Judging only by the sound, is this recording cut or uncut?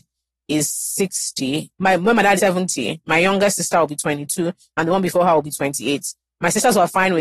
cut